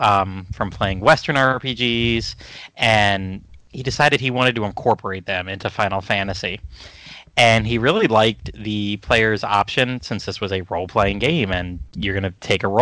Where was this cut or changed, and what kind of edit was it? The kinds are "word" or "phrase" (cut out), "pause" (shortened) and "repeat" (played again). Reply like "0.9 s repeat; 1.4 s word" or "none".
none